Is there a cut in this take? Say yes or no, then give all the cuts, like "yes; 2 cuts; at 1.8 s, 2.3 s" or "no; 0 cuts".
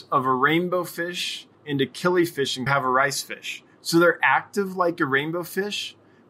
yes; 2 cuts; at 1.5 s, 2.7 s